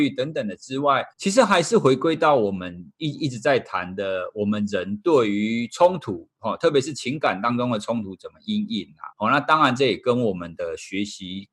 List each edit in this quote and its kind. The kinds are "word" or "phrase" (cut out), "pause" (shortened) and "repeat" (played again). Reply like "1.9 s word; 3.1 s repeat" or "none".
1.1 s pause; 9.1 s pause